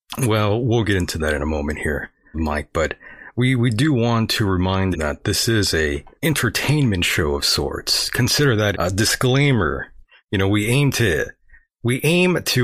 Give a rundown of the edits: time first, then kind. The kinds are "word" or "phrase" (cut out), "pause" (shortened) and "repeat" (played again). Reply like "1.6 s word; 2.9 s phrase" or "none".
2.3 s word; 4.9 s word; 6.1 s pause; 8.7 s word

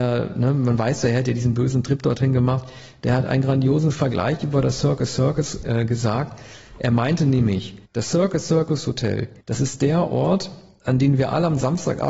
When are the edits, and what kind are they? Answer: 5.6 s word; 7.9 s pause; 9.4 s pause

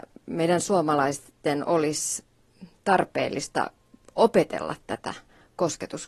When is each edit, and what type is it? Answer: none

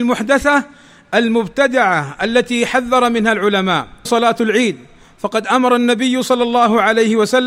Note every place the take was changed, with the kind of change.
4.1 s word

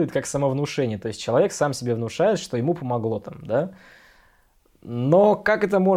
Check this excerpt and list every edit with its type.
none

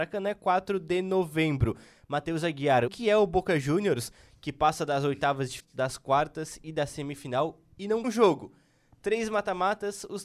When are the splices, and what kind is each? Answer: 2.9 s word; 5.6 s word; 8.0 s word

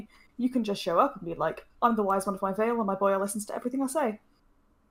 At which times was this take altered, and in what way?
1.7 s pause

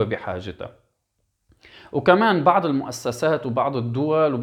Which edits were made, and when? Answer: none

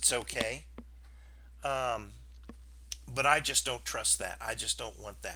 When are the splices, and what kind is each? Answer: none

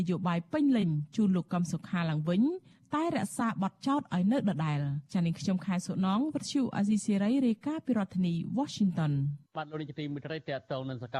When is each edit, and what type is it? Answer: 5.1 s pause; 9.5 s pause

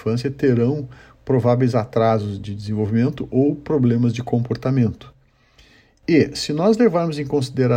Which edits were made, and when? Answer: none

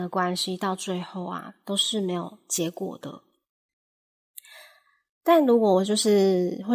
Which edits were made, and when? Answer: none

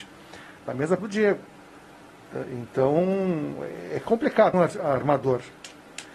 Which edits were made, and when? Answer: 1.0 s word; 4.5 s phrase

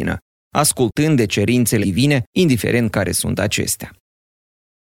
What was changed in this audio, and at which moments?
1.8 s word; 2.3 s pause

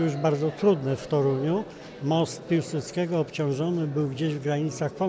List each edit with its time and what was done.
none

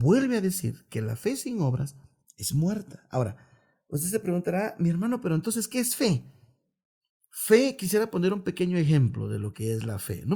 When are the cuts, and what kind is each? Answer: none

